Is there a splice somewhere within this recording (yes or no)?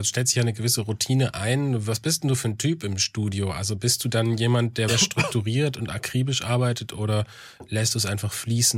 yes